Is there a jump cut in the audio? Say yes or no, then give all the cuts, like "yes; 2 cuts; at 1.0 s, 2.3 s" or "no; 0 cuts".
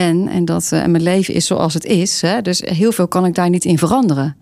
no; 0 cuts